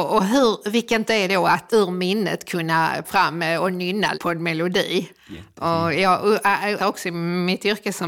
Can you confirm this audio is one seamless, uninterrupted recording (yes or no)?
no